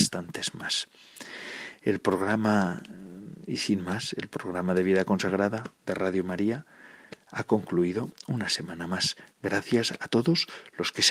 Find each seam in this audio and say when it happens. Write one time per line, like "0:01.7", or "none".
none